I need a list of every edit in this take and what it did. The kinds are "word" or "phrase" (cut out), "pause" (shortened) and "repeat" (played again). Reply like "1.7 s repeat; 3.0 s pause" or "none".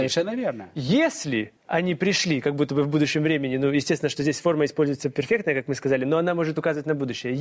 1.6 s pause